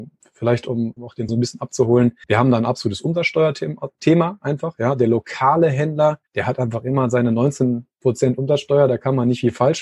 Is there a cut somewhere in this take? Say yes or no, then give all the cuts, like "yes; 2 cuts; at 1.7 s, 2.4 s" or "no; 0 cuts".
yes; 4 cuts; at 1.0 s, 1.3 s, 2.2 s, 6.3 s